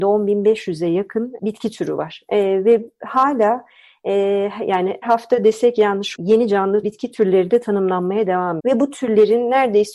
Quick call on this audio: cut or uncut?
cut